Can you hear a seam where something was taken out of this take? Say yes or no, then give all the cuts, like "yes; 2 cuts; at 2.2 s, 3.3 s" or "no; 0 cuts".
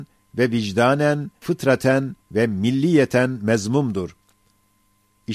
yes; 2 cuts; at 1.4 s, 2.2 s